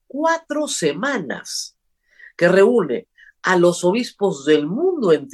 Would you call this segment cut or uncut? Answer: uncut